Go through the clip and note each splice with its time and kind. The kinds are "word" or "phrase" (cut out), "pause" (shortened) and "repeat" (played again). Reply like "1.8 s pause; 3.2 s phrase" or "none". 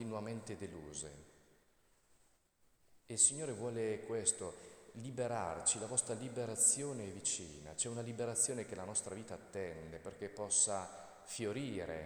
3.0 s pause